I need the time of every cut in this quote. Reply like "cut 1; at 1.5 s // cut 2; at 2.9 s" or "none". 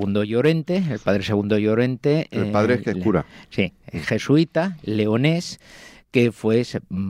none